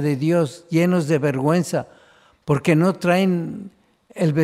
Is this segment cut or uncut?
uncut